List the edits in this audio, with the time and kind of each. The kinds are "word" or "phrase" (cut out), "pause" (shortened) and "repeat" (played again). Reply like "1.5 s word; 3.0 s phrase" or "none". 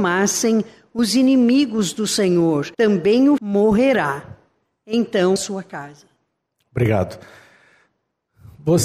2.7 s pause; 3.4 s phrase; 5.4 s phrase